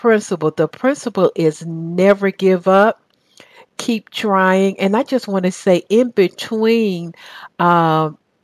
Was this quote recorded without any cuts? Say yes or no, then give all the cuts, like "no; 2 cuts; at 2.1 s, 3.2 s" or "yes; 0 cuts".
yes; 0 cuts